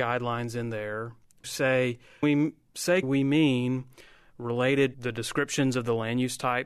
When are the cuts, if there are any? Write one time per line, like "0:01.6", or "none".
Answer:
0:01.4
0:02.2
0:03.0
0:04.9